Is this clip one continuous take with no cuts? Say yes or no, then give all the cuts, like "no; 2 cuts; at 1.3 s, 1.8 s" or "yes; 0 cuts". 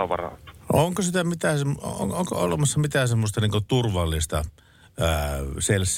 yes; 0 cuts